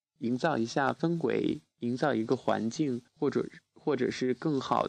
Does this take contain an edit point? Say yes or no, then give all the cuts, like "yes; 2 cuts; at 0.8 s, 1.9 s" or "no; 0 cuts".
yes; 1 cut; at 3.1 s